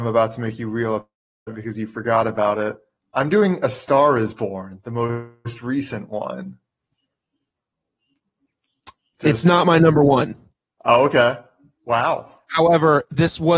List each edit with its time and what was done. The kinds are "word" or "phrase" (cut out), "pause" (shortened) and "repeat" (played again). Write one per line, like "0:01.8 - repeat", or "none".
none